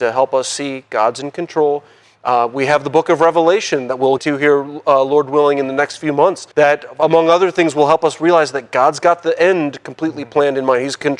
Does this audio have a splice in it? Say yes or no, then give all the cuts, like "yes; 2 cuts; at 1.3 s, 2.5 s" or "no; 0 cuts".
yes; 2 cuts; at 4.2 s, 6.5 s